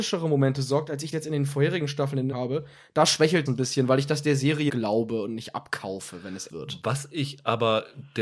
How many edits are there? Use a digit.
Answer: 5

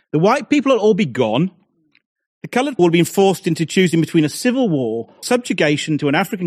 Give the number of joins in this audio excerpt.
2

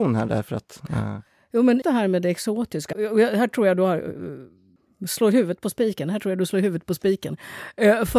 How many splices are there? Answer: 2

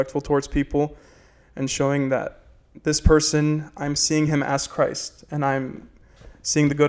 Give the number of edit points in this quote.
0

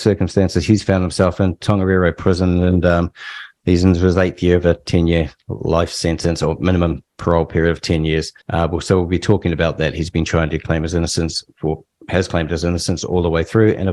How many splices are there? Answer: 1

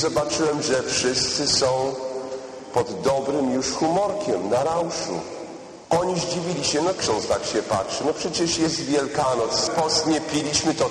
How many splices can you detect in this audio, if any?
2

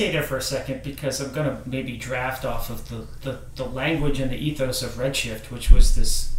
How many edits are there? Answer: 0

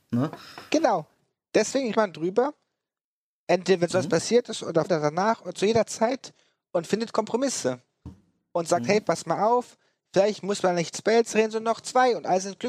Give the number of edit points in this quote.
3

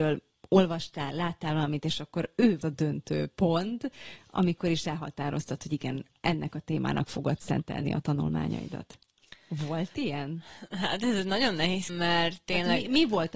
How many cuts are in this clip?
2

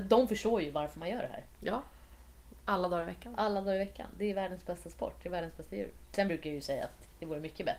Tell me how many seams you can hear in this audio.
0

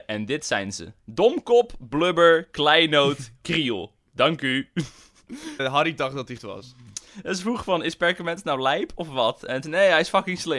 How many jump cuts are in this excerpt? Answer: 2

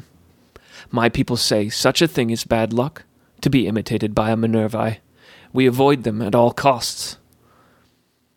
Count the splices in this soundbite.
0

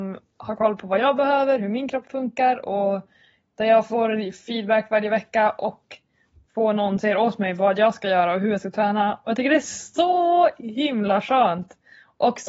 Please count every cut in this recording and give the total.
1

